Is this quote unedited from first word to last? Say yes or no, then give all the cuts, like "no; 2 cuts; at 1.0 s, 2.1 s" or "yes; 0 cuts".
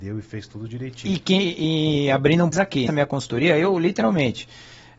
no; 2 cuts; at 2.5 s, 2.9 s